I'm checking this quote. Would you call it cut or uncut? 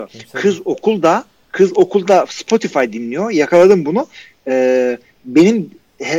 uncut